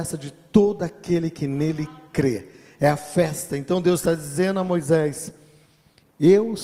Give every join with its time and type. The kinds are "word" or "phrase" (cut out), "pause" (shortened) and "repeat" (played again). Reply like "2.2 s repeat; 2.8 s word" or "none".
none